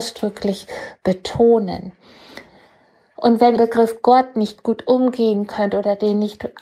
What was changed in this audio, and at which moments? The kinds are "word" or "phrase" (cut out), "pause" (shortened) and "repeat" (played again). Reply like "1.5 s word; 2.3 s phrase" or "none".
3.6 s phrase